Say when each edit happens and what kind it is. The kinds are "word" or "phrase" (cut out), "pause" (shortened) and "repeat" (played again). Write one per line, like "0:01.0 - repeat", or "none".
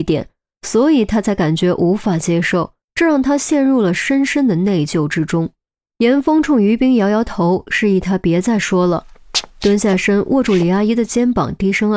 0:02.8 - pause
0:05.7 - pause